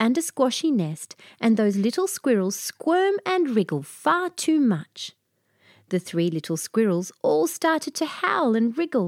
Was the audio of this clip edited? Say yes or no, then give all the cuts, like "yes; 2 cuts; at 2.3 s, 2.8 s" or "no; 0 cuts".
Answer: no; 0 cuts